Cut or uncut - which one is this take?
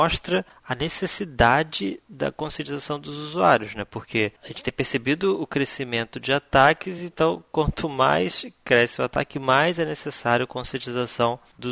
uncut